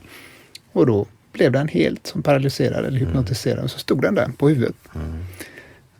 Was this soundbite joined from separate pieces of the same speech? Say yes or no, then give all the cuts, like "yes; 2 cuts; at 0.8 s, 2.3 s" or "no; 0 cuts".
no; 0 cuts